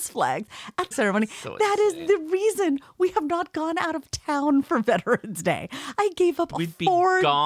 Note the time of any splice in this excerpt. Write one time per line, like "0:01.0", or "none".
0:00.9